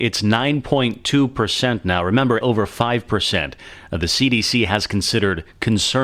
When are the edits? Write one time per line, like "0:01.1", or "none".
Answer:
0:02.4